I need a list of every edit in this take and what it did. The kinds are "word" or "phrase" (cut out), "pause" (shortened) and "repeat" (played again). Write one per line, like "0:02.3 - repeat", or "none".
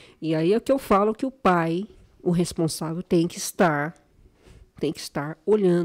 none